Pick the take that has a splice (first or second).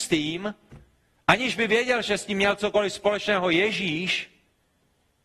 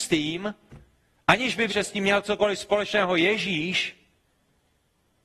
second